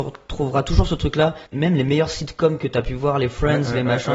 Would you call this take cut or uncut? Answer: cut